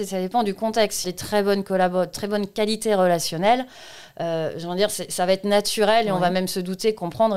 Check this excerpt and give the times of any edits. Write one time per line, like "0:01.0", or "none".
0:01.0